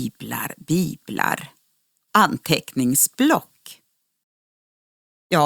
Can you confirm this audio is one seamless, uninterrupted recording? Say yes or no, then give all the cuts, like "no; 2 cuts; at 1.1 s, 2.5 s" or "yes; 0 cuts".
no; 1 cut; at 2.1 s